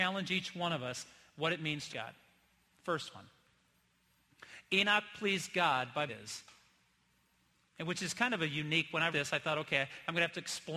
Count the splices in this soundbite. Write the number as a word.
three